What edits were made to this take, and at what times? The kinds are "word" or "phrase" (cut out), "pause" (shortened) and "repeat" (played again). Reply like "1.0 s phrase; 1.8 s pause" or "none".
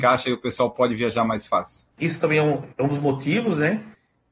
1.9 s pause; 2.7 s pause